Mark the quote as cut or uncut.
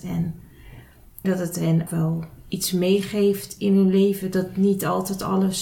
cut